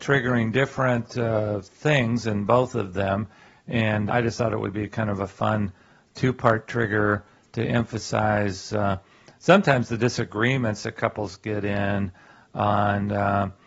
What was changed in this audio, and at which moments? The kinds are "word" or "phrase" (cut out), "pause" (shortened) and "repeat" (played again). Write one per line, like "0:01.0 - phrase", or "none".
0:04.1 - word

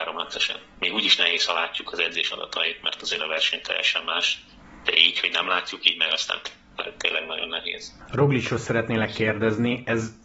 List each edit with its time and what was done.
none

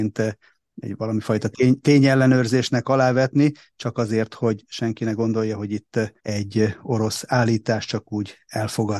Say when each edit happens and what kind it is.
0:06.2 - pause

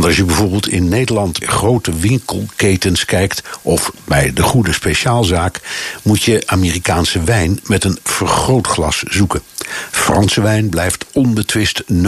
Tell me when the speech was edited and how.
0:01.4 - word

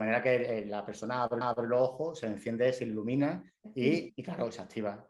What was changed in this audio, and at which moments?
0:01.4 - repeat
0:04.1 - word

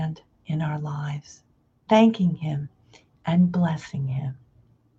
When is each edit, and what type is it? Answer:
0:01.9 - word

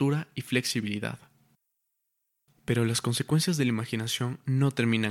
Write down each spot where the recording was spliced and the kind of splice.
none

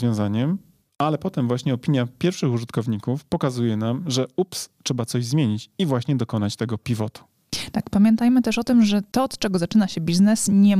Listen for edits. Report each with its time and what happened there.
none

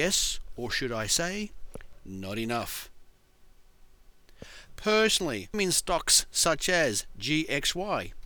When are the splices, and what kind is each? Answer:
0:02.0 - word
0:05.5 - word

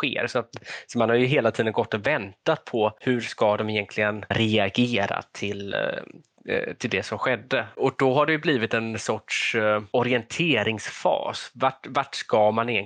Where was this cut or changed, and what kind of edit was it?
none

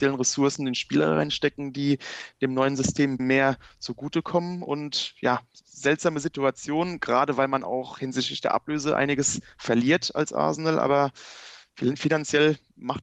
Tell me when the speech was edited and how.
0:03.2 - word

